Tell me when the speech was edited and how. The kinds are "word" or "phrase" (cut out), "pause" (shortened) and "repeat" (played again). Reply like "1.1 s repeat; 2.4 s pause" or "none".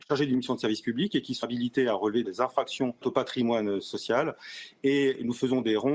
1.4 s word; 2.2 s word; 3.0 s word

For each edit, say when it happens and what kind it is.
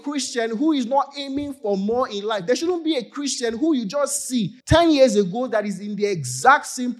4.6 s pause

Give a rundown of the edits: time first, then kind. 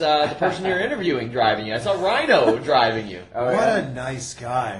none

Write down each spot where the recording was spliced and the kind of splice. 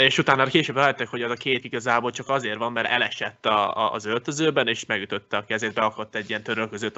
1.6 s word

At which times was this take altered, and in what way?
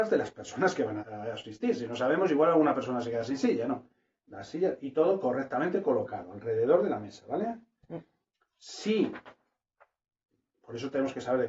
1.0 s word

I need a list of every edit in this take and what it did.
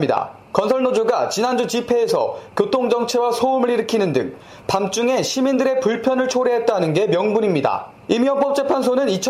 none

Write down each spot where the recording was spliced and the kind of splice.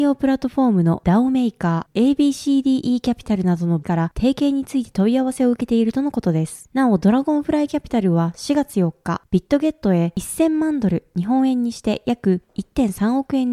3.8 s word

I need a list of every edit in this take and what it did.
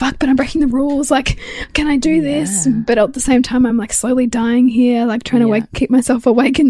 none

